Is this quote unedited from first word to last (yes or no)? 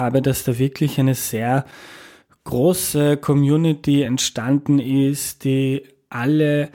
yes